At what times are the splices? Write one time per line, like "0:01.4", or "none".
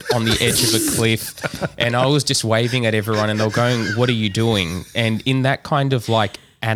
none